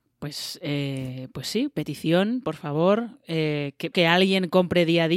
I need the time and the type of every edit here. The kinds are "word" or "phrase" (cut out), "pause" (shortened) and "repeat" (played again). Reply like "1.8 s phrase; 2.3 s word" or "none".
3.9 s word